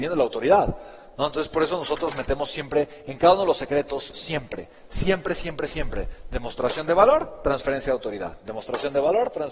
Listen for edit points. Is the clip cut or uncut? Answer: uncut